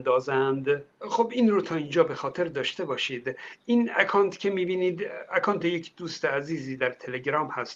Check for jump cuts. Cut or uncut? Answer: cut